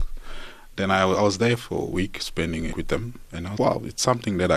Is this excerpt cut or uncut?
cut